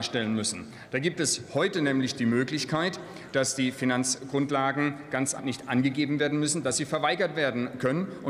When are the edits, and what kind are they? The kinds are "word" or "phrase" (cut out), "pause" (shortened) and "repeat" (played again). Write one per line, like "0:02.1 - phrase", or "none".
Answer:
0:05.4 - word